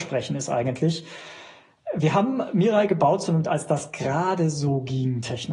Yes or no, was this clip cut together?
yes